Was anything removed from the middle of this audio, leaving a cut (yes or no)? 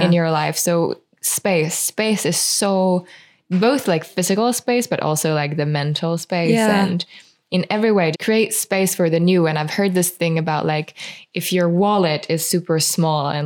yes